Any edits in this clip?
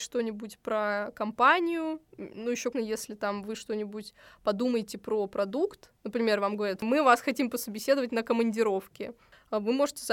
yes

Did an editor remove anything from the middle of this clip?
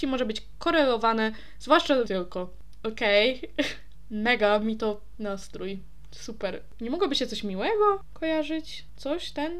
yes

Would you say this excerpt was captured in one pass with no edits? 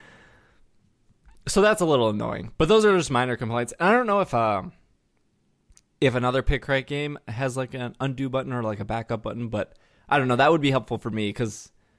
yes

